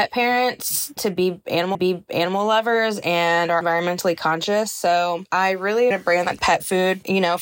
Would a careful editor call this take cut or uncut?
cut